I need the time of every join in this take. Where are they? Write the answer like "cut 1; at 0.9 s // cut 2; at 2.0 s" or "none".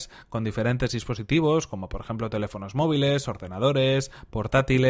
none